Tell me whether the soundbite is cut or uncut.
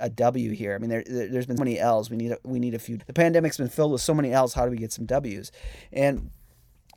cut